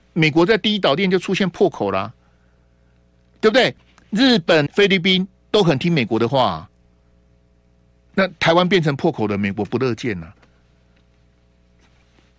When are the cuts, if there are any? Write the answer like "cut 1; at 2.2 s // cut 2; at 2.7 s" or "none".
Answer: cut 1; at 4.7 s